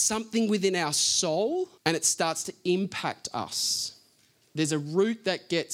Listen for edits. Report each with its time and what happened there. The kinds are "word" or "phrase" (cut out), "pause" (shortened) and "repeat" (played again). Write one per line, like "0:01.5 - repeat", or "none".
0:01.8 - pause